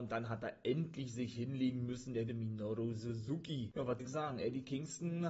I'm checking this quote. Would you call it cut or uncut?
cut